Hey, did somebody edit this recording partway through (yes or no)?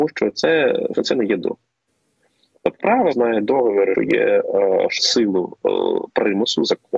yes